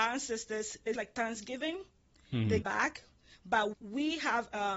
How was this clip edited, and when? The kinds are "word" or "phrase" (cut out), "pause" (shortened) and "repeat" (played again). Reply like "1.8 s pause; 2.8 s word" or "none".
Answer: 0.9 s word; 2.6 s word; 3.7 s word